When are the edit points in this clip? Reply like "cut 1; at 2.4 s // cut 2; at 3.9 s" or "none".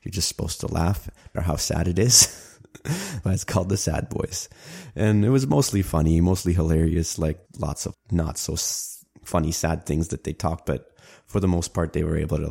cut 1; at 1.3 s // cut 2; at 3.2 s // cut 3; at 7.4 s // cut 4; at 7.9 s // cut 5; at 9.1 s // cut 6; at 10.6 s